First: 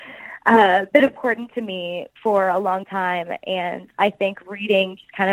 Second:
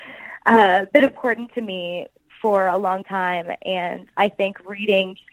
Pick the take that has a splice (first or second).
first